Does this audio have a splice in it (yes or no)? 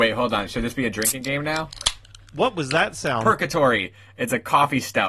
no